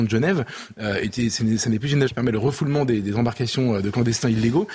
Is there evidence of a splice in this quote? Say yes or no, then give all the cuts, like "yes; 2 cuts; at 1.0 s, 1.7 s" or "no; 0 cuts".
yes; 1 cut; at 2.1 s